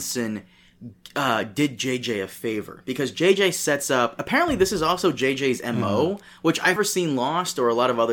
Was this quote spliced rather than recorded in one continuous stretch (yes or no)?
yes